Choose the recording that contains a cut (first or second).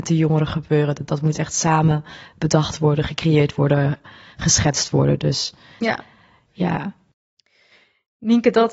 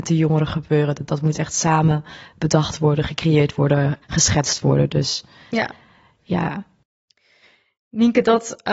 second